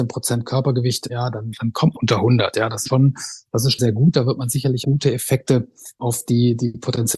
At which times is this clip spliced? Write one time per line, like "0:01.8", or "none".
0:01.1
0:01.9
0:02.8
0:03.8
0:04.8
0:06.0

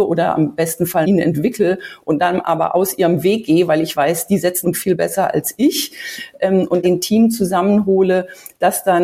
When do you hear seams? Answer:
0:01.0
0:04.6
0:06.8

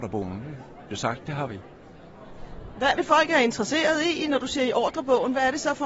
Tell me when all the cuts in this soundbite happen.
0:00.9
0:03.0

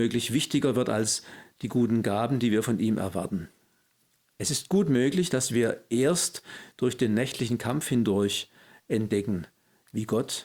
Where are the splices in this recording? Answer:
none

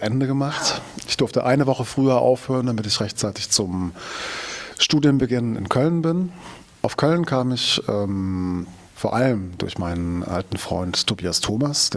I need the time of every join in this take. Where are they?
0:08.9

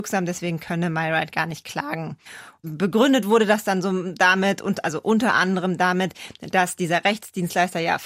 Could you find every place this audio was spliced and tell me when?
none

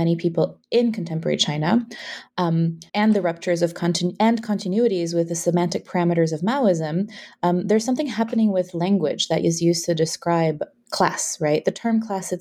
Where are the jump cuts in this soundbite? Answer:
0:02.9

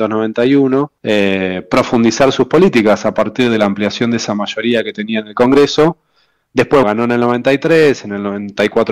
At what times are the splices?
0:01.0
0:06.8

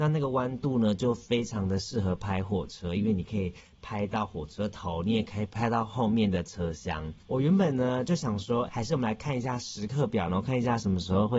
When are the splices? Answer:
0:07.2
0:08.7

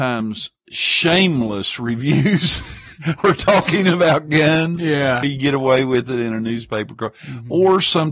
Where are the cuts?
0:05.2

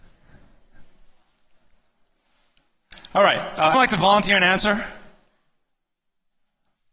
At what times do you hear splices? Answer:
0:03.7

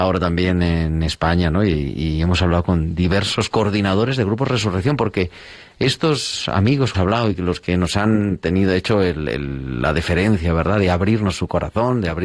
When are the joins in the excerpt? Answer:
0:06.9

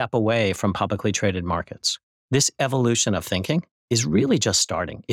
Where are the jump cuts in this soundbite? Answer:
none

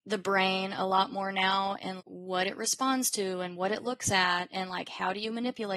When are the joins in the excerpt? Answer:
0:02.0

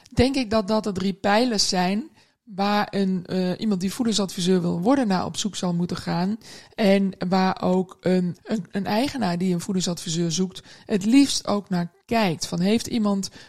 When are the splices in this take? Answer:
0:08.4

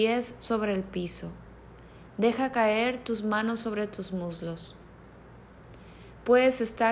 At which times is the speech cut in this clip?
none

